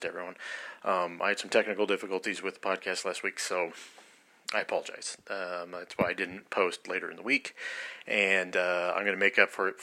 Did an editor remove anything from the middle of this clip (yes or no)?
no